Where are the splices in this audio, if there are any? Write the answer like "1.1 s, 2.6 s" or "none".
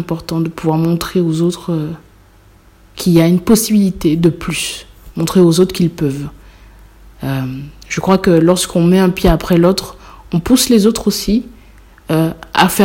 none

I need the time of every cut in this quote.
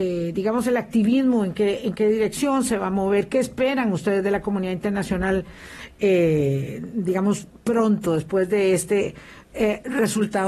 none

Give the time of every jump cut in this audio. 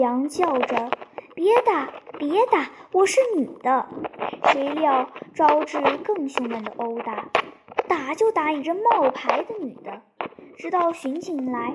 none

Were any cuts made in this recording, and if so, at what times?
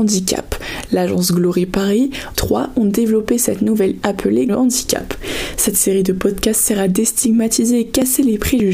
2.3 s, 4.0 s, 4.5 s

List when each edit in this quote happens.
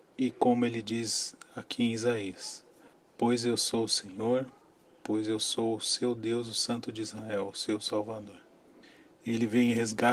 none

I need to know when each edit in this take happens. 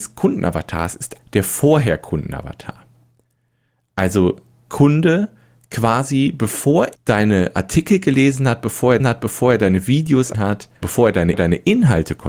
1.2 s, 4.7 s, 6.9 s, 9.0 s, 10.3 s, 10.8 s, 11.3 s

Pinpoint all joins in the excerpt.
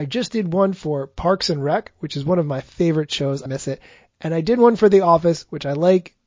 3.5 s

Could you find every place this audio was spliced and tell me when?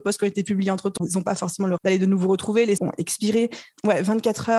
1.0 s, 1.8 s, 2.8 s

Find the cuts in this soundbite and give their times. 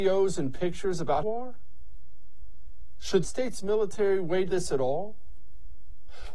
1.2 s, 3.2 s, 4.5 s

